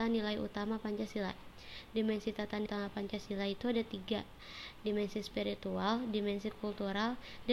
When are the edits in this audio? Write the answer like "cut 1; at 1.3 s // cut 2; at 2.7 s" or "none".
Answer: cut 1; at 2.7 s